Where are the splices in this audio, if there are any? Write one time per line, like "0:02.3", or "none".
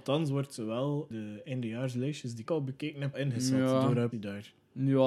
0:01.1
0:02.5
0:03.1
0:04.1